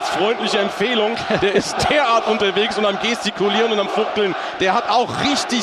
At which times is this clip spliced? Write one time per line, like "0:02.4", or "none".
none